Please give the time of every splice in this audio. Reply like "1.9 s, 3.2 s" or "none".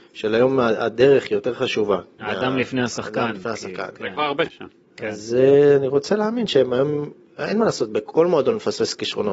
4.5 s